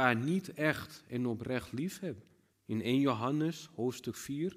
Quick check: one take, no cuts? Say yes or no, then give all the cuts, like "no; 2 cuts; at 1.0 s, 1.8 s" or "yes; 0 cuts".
no; 1 cut; at 2.5 s